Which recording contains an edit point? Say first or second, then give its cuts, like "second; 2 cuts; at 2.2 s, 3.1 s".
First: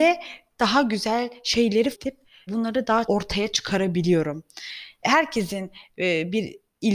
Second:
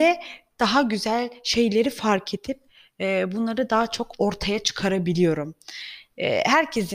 first; 4 cuts; at 1.9 s, 2.5 s, 3.0 s, 5.0 s